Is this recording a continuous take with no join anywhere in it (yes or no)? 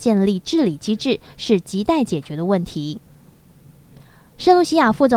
yes